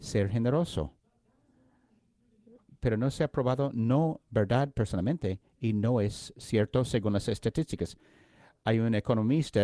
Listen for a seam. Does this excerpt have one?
no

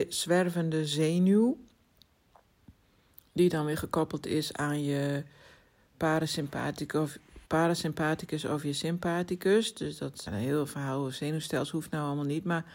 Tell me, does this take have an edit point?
yes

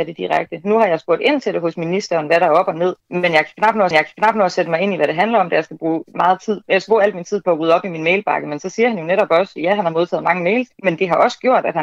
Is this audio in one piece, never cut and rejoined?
no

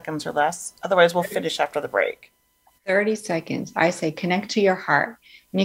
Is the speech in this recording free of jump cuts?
yes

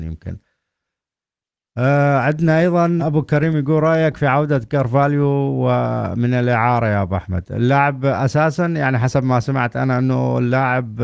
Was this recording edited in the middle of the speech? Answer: yes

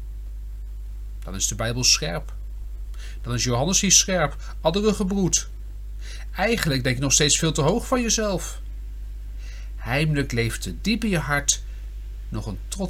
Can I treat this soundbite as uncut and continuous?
yes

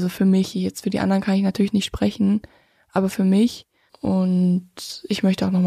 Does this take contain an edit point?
yes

